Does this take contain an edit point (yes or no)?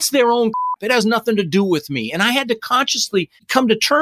no